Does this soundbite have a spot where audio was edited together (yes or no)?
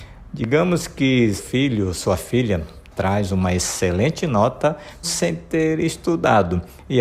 yes